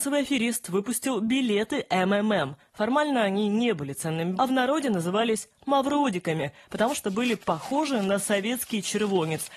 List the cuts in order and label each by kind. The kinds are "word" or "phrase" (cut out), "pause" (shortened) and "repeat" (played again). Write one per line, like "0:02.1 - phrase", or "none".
0:04.4 - word